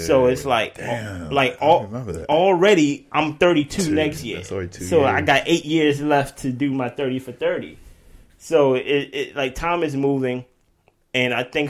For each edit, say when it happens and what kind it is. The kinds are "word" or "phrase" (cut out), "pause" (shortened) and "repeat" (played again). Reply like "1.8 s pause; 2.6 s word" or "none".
none